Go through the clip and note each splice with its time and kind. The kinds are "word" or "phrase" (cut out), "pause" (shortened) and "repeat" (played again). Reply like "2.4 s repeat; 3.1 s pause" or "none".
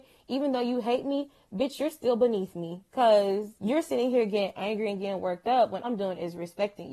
3.6 s pause; 5.8 s word